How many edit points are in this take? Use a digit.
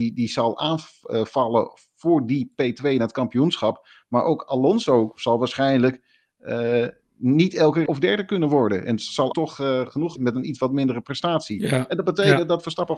3